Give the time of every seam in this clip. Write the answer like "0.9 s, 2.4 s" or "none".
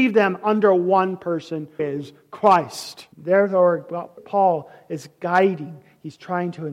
1.8 s, 3.1 s, 4.2 s